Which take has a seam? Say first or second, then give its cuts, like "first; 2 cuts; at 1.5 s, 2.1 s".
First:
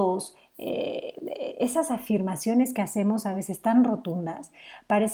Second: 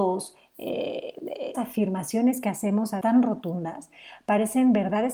second; 2 cuts; at 1.5 s, 3.0 s